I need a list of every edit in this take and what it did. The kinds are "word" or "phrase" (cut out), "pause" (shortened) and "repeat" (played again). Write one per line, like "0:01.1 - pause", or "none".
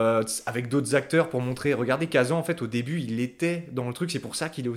none